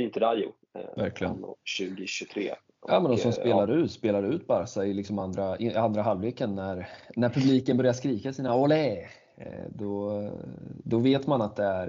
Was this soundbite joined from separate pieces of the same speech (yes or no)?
no